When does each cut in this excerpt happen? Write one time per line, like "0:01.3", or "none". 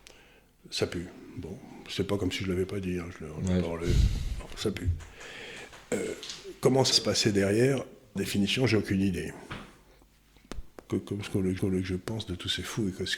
0:06.9
0:08.2
0:11.6